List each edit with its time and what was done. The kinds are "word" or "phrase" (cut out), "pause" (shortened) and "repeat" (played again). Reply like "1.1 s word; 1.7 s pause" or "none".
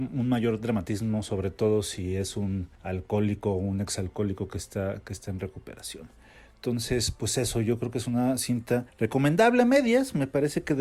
none